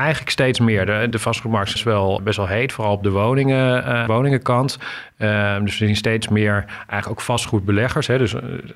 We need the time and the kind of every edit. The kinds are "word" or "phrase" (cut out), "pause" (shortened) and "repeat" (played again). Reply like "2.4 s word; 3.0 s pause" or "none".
1.1 s word; 1.8 s word; 2.2 s word; 4.1 s word